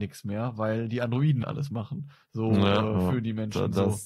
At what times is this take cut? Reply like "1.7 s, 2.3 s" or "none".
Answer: 1.4 s

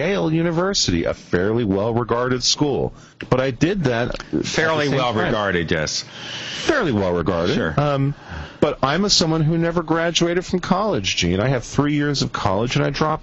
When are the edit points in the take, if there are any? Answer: none

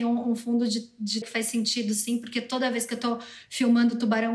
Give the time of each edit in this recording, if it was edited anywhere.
1.2 s

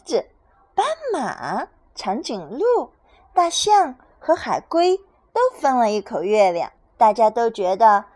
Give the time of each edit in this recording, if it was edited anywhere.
6.9 s

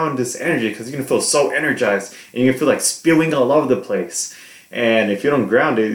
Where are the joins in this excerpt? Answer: none

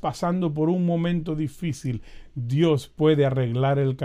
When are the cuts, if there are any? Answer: none

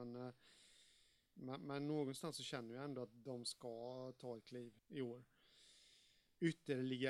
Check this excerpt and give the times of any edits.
4.8 s

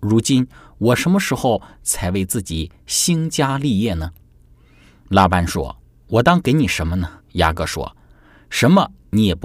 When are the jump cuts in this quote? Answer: 7.2 s

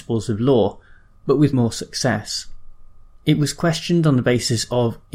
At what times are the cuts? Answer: 1.5 s

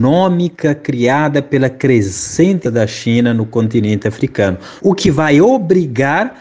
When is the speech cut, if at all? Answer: 2.6 s, 4.8 s

